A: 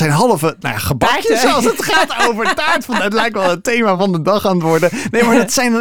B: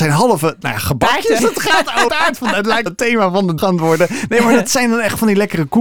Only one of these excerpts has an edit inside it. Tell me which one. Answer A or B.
B